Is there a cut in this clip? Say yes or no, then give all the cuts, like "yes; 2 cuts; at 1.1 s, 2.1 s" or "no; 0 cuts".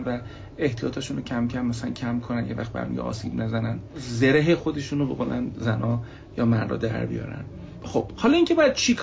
no; 0 cuts